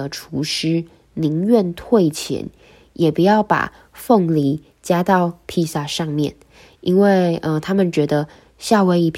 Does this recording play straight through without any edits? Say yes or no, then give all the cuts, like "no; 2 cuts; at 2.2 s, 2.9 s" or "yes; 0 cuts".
yes; 0 cuts